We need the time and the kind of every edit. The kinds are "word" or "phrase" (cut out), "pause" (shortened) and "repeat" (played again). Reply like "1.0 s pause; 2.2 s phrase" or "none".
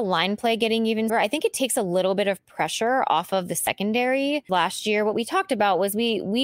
1.1 s word; 4.5 s phrase